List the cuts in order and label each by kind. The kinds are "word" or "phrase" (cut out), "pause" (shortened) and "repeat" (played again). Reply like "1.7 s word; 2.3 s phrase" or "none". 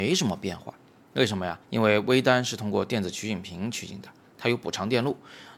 1.6 s pause

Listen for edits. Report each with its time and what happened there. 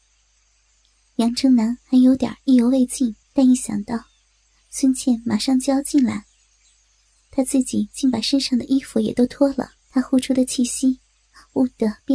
3.2 s pause; 9.8 s pause

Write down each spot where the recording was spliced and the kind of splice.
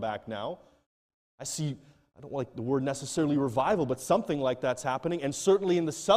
none

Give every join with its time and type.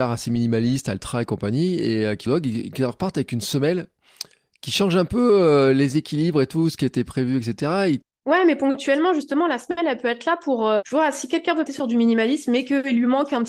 2.3 s phrase; 10.8 s word; 11.7 s word

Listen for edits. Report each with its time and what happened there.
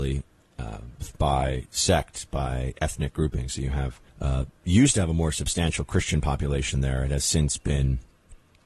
4.1 s pause

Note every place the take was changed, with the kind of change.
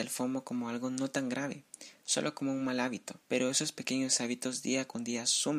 3.2 s pause

